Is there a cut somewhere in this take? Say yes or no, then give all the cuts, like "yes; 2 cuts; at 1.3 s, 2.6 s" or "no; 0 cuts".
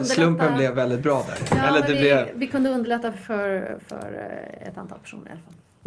no; 0 cuts